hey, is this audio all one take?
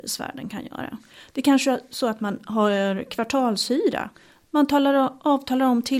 yes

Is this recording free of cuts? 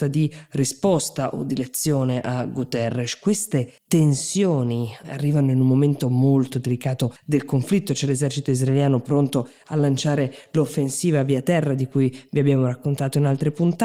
no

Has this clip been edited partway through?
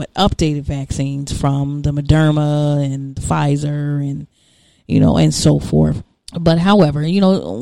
no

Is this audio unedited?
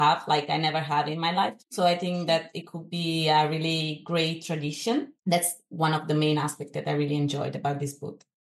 no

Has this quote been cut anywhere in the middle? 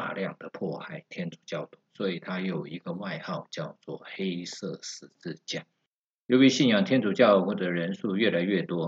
yes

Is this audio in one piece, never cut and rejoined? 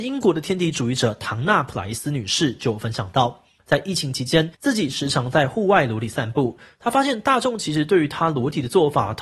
no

